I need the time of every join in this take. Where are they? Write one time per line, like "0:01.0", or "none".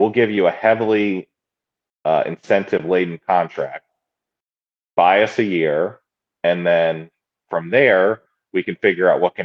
none

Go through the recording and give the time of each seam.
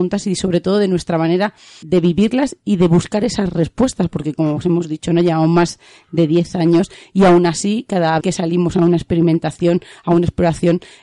0:01.8
0:08.2

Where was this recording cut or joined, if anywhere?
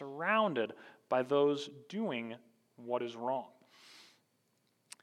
none

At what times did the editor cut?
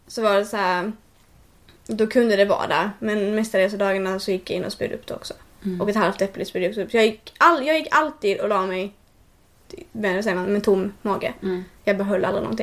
none

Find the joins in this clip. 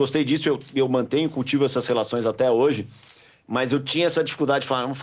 none

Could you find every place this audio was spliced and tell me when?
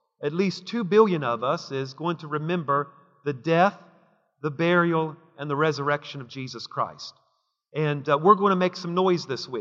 none

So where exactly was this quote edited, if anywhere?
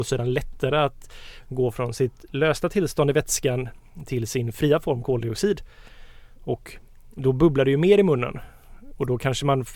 none

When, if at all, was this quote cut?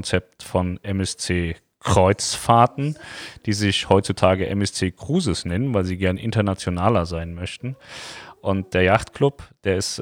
none

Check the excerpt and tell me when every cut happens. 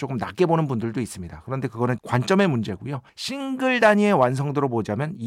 0:02.0
0:03.1

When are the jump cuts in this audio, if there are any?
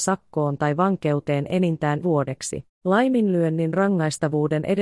0:02.0
0:02.7

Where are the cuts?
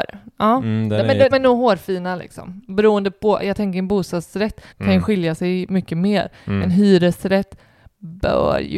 0:01.3
0:04.7

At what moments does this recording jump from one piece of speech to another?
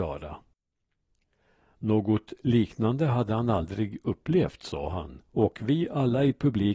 0:05.2

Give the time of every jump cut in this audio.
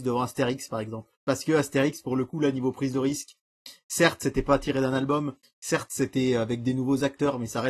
0:01.2

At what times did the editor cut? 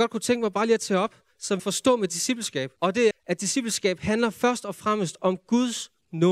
0:01.6
0:02.8
0:03.1

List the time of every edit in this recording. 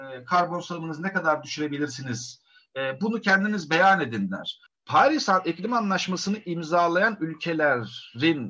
0:04.7

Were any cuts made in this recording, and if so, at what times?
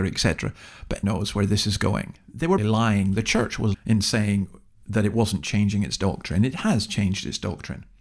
0:01.0
0:02.6
0:03.7

